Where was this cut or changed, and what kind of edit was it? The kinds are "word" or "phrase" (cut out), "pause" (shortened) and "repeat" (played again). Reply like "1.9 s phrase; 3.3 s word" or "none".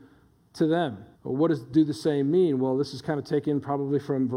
1.1 s pause